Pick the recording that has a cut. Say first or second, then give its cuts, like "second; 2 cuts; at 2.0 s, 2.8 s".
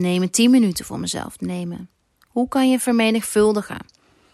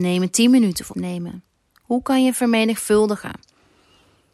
second; 1 cut; at 0.9 s